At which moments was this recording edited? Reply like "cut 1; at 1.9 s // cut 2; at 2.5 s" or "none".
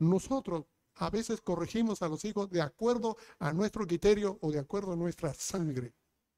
none